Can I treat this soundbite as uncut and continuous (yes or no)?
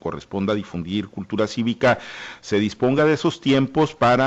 yes